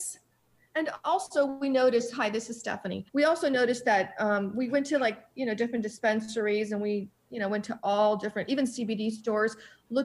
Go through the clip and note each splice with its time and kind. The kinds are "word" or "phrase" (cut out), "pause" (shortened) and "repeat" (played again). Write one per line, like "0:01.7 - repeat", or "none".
0:03.1 - pause